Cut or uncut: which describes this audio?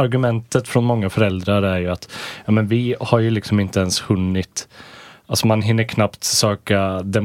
uncut